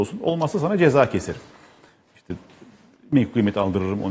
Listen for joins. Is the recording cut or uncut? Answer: uncut